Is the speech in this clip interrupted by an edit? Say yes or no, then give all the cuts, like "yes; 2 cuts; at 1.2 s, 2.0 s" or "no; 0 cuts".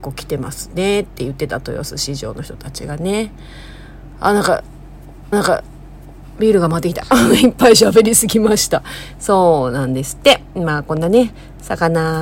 yes; 1 cut; at 5.3 s